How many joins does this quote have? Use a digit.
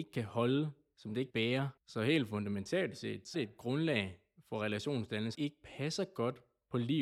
4